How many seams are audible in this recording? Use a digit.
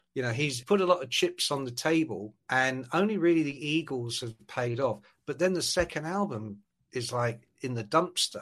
0